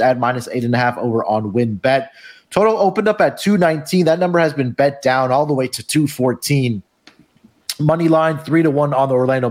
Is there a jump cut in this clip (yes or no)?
no